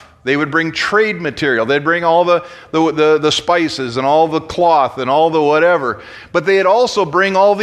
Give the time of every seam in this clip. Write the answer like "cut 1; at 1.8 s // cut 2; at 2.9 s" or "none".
none